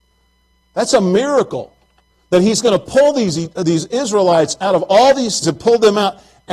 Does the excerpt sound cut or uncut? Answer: cut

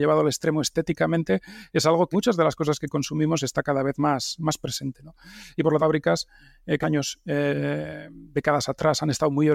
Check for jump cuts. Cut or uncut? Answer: cut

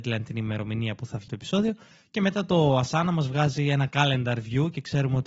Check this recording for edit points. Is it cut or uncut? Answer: cut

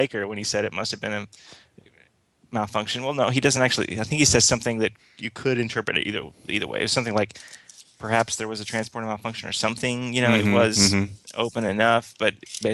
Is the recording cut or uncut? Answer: uncut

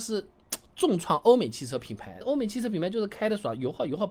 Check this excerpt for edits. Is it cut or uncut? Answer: cut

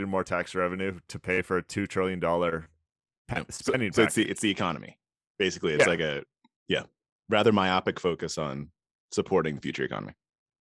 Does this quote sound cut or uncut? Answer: uncut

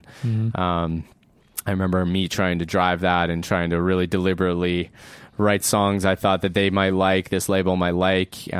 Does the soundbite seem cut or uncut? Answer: uncut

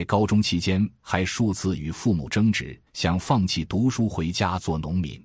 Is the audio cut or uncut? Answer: cut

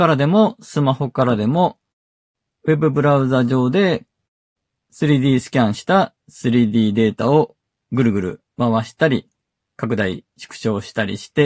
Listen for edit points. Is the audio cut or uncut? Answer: uncut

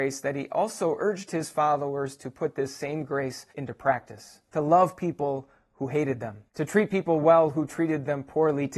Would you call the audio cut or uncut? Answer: cut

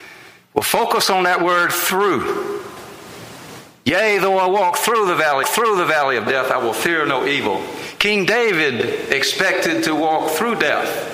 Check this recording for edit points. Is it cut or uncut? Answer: cut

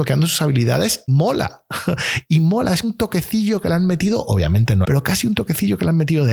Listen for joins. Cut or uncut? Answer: cut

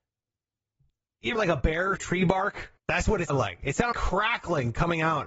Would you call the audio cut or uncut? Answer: cut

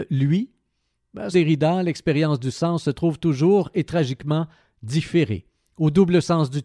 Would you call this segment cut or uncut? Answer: cut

